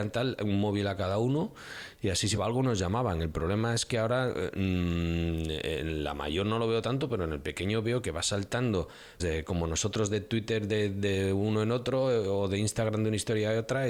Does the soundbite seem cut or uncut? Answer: cut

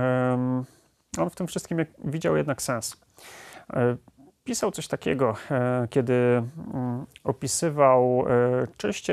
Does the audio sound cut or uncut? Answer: uncut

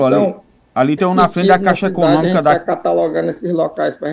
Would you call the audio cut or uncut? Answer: cut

